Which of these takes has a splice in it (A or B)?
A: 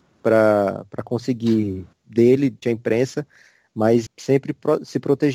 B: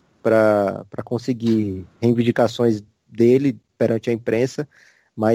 A